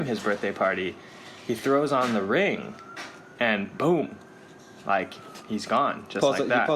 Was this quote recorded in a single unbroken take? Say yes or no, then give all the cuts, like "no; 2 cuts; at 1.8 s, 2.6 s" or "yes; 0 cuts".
yes; 0 cuts